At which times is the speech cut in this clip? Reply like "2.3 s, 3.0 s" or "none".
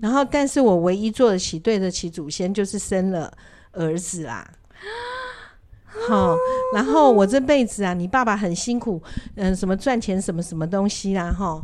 none